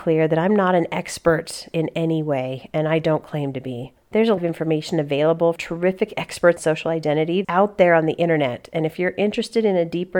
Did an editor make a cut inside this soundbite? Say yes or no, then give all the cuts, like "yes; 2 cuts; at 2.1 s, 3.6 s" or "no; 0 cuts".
yes; 6 cuts; at 1.7 s, 4.0 s, 4.4 s, 5.6 s, 6.6 s, 7.4 s